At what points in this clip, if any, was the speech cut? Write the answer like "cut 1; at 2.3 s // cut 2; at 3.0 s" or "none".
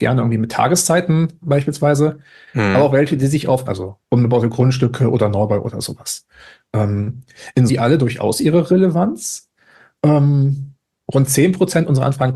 cut 1; at 1.4 s // cut 2; at 3.7 s // cut 3; at 7.7 s